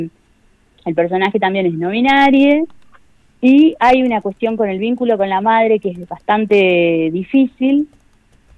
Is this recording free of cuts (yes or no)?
yes